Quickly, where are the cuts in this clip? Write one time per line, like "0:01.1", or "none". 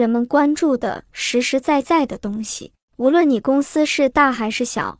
0:02.8

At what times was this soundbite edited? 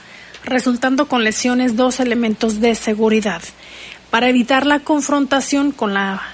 none

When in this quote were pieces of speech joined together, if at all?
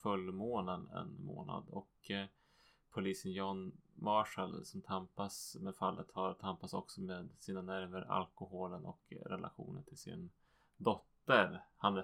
none

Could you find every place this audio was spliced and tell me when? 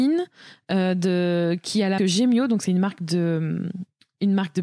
0:02.0

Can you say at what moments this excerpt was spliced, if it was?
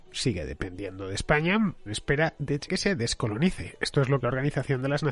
0:01.9
0:02.7
0:04.2

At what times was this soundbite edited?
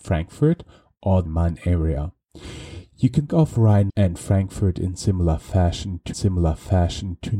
0:01.3
0:03.3
0:03.9
0:06.1

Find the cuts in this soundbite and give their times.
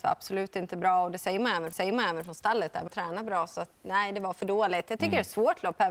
0:01.7
0:02.9

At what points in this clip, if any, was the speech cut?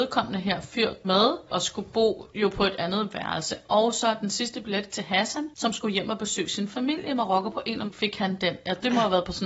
0:01.0
0:04.9
0:07.9

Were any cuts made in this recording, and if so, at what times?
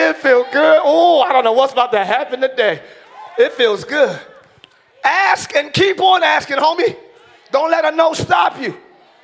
none

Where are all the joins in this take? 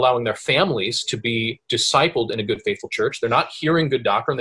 none

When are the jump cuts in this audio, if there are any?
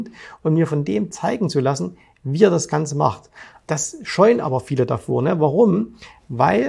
none

